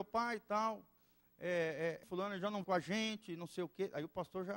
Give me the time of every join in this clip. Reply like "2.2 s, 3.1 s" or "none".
2.0 s, 2.6 s